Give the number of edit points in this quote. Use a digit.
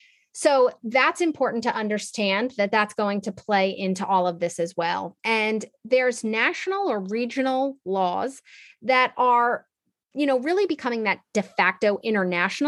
1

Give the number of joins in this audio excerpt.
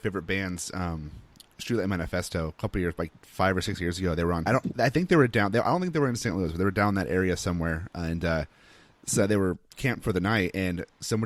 1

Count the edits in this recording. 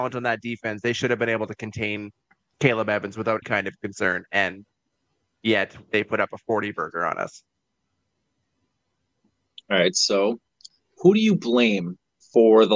2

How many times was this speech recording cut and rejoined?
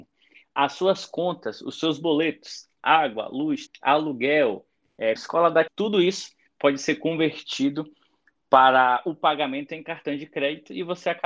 3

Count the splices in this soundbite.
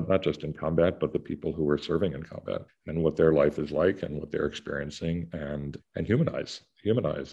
2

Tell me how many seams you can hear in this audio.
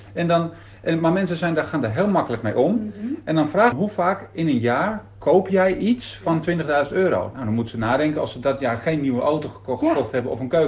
1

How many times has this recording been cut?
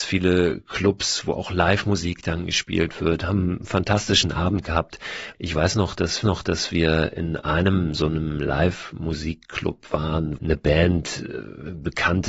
2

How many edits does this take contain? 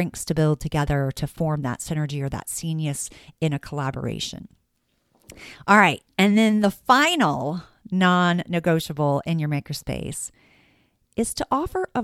0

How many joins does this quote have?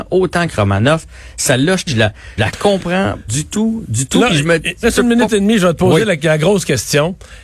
4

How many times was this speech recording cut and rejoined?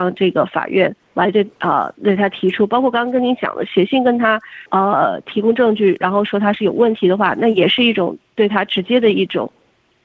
2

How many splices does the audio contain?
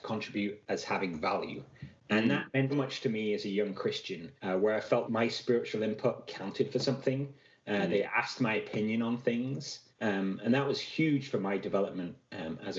4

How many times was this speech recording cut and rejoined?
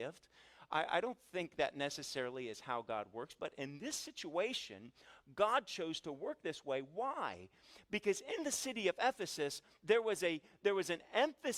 0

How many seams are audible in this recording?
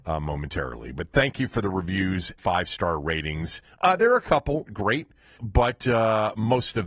3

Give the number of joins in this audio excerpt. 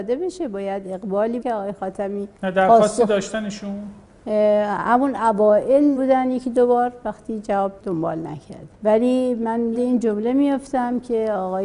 6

